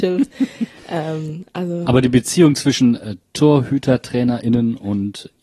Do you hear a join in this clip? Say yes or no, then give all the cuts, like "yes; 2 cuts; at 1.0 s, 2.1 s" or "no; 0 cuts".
no; 0 cuts